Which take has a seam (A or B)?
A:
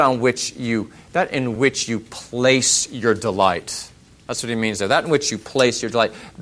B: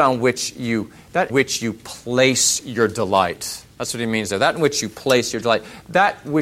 B